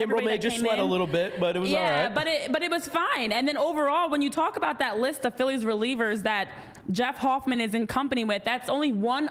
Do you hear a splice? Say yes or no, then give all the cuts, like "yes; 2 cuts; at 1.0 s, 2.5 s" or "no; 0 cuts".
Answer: no; 0 cuts